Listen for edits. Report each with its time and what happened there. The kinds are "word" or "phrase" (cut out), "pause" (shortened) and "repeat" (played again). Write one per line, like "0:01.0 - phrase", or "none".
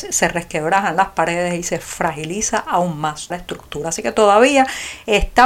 0:03.3 - word